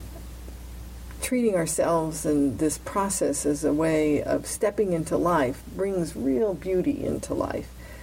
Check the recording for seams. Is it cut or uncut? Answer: uncut